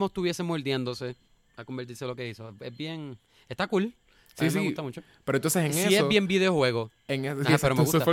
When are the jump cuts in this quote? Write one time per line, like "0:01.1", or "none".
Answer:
none